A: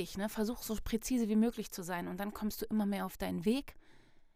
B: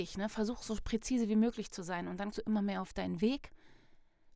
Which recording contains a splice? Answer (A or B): B